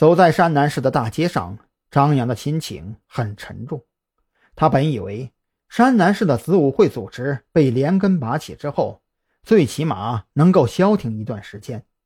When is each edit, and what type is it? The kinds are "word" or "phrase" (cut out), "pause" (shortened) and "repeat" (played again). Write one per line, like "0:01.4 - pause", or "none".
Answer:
none